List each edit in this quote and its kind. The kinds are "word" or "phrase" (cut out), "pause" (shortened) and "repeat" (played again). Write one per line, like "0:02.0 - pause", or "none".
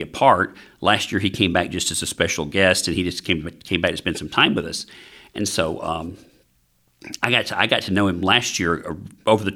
none